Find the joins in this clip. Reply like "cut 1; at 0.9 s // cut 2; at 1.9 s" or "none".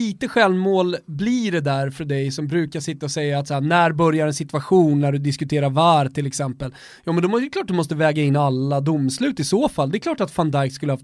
none